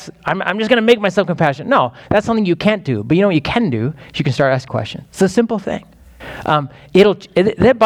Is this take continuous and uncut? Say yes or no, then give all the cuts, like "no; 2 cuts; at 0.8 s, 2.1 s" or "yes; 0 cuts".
no; 1 cut; at 4.7 s